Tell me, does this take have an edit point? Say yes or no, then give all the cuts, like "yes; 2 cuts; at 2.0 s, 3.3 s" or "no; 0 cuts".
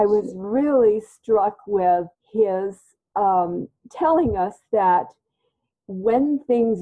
yes; 1 cut; at 2.1 s